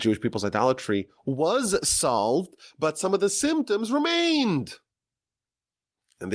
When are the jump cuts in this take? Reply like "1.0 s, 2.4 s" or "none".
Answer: none